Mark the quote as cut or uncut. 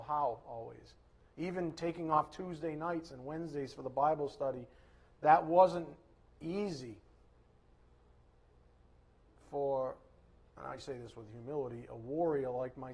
uncut